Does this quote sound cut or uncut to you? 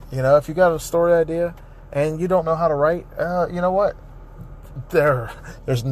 uncut